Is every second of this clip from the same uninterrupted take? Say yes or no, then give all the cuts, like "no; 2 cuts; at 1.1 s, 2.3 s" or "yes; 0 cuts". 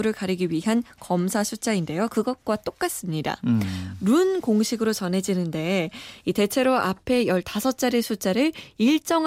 yes; 0 cuts